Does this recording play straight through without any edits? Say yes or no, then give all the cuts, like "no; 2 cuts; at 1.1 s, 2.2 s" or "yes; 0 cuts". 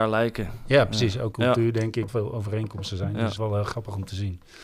no; 3 cuts; at 1.3 s, 2.1 s, 3.4 s